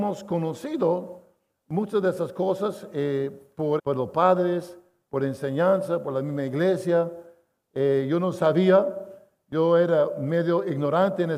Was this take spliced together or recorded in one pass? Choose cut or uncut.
cut